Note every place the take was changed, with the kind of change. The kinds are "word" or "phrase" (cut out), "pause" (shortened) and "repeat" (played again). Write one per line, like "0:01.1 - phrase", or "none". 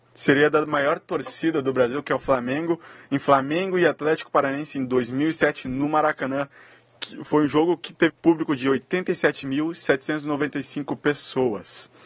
0:08.1 - word